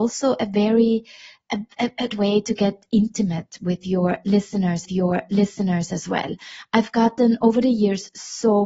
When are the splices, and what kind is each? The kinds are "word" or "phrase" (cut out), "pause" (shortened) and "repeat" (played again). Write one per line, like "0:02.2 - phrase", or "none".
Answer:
0:02.1 - word
0:04.8 - repeat

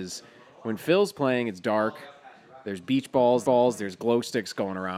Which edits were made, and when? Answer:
0:03.4 - repeat

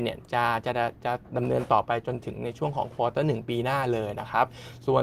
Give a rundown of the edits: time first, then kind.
none

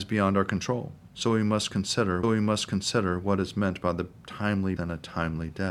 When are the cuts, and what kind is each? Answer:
0:01.0 - pause
0:02.2 - repeat
0:04.8 - word

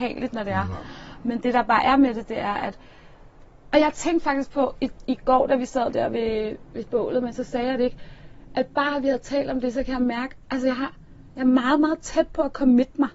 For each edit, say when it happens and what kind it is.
none

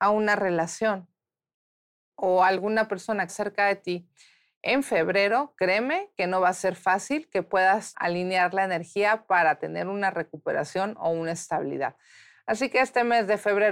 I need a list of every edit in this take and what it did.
0:03.3 - phrase
0:07.9 - word

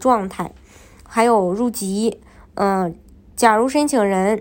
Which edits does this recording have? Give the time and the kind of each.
none

